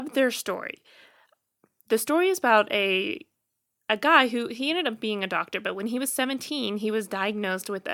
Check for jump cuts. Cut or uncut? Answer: uncut